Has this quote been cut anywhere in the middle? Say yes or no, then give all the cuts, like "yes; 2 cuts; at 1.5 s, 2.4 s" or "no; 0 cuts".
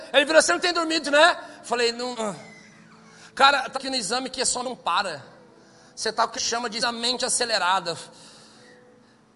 yes; 6 cuts; at 1.0 s, 2.1 s, 3.7 s, 4.6 s, 6.3 s, 6.8 s